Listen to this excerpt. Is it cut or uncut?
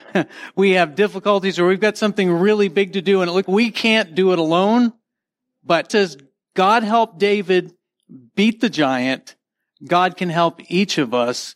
cut